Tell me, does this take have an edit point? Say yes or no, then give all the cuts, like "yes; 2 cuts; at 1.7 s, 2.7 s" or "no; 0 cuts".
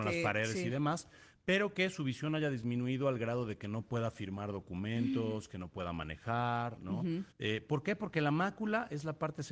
yes; 1 cut; at 7.3 s